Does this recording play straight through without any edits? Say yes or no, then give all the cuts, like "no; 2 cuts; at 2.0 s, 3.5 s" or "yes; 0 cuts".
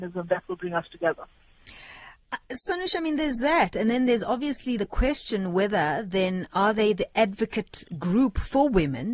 no; 1 cut; at 4.8 s